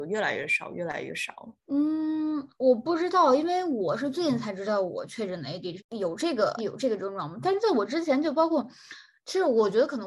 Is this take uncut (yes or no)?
no